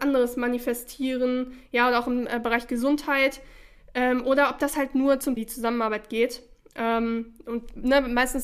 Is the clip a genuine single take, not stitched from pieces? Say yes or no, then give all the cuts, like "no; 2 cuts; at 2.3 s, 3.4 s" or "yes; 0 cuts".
no; 1 cut; at 5.4 s